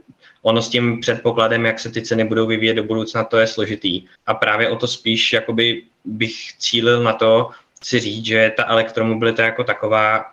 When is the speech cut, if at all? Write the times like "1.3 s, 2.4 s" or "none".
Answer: 4.2 s